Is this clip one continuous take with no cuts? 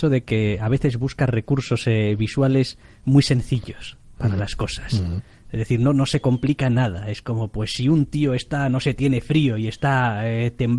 yes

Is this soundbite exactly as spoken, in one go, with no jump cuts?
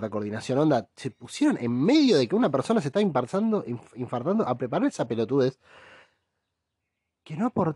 yes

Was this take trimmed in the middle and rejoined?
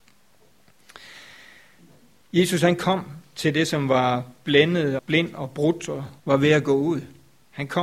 yes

